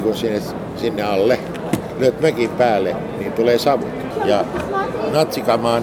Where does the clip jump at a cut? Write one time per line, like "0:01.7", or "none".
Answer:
none

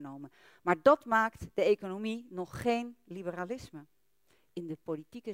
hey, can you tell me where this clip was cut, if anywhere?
none

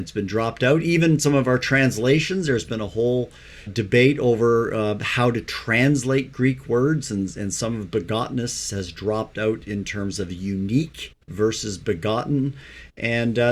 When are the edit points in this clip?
0:03.7
0:11.2

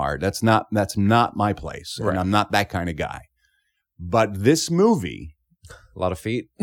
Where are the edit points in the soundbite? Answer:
none

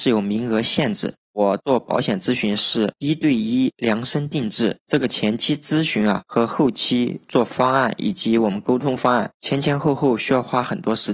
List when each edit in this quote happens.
none

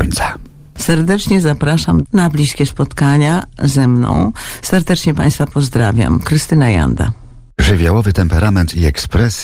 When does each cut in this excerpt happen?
none

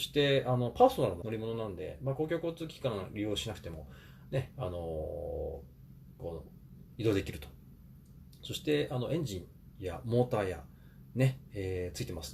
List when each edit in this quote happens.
0:01.2

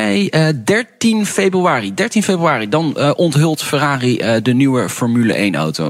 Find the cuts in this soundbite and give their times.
none

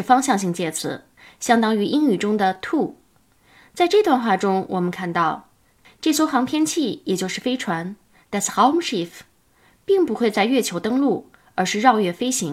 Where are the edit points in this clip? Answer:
none

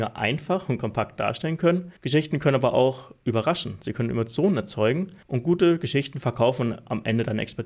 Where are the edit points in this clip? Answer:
0:02.0
0:05.2

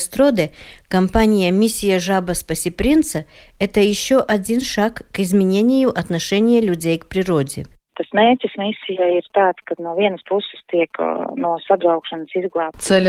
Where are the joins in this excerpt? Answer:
none

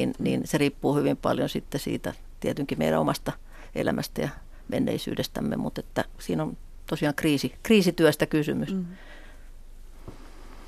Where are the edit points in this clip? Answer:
none

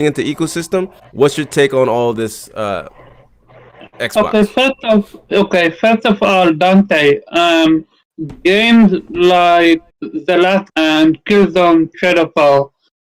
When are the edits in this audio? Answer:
0:01.0
0:09.9
0:10.7
0:11.9

